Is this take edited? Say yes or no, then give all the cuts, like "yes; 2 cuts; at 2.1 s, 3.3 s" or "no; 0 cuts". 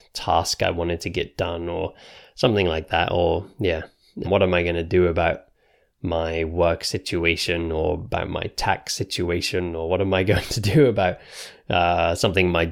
yes; 1 cut; at 4.2 s